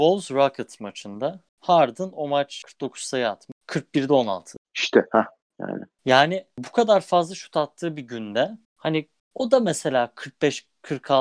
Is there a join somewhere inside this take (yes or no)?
no